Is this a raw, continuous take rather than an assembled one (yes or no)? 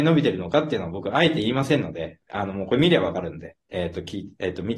yes